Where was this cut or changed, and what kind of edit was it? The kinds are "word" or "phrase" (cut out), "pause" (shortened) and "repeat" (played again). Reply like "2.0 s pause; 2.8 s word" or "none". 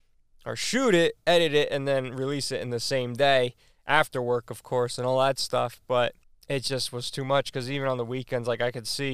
6.2 s pause